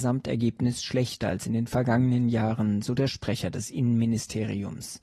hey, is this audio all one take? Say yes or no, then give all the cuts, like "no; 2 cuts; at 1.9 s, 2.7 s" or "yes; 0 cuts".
yes; 0 cuts